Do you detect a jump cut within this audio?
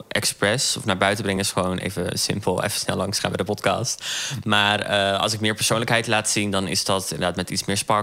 no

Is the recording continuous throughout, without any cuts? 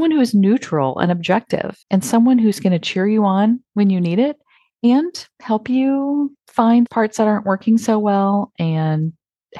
no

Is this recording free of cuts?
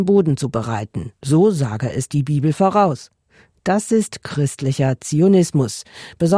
yes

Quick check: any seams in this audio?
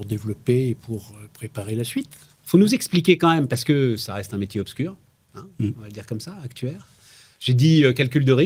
no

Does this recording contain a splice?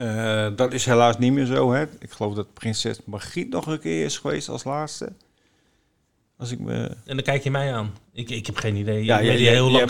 no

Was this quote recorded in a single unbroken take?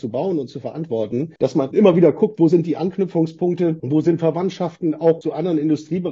no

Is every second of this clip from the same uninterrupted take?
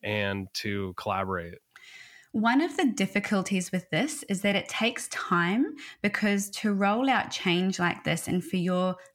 yes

